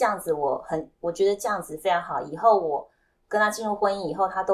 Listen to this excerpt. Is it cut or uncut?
uncut